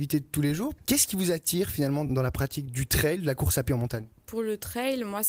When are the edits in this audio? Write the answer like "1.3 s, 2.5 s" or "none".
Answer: none